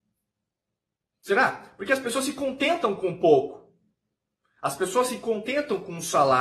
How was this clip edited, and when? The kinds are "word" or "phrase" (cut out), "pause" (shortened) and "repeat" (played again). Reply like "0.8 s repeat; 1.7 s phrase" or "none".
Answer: none